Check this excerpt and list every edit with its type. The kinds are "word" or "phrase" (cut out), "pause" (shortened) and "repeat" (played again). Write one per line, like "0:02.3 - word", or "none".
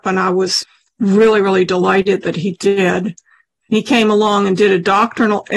none